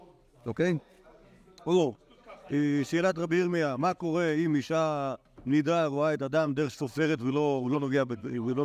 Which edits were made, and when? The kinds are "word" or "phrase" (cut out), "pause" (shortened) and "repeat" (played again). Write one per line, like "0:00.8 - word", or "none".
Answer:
none